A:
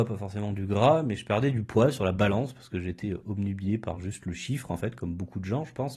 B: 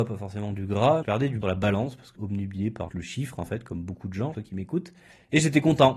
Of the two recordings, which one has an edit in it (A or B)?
B